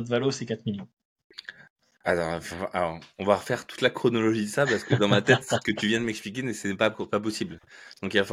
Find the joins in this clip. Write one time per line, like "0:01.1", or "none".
none